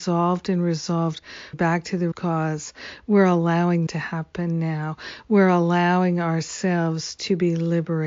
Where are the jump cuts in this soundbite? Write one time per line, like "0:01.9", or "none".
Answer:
0:01.5
0:02.1
0:03.9